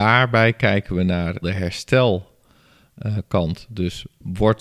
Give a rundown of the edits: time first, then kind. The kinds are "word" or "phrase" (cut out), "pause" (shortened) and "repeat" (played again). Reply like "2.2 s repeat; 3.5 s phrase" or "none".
1.4 s word